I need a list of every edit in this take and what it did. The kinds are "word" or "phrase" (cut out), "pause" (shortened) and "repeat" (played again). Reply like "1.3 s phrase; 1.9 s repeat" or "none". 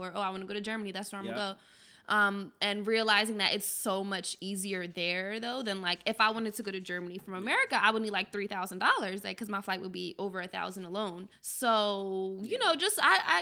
11.3 s pause